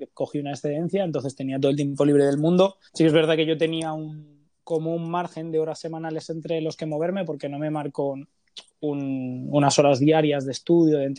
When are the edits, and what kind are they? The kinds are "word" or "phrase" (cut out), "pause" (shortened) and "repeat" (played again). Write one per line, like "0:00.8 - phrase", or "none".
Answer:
0:02.9 - pause
0:04.5 - pause

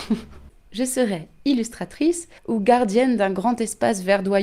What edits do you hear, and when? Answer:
0:02.4 - pause

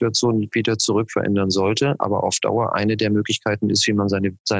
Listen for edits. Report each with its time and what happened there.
none

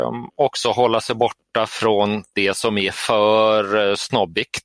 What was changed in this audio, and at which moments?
none

